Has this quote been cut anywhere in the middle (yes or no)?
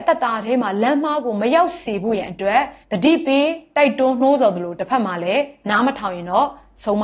yes